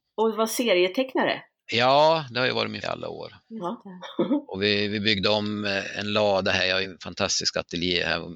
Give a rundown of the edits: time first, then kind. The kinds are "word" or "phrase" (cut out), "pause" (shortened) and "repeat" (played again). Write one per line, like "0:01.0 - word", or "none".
0:02.8 - phrase
0:03.4 - pause
0:06.8 - word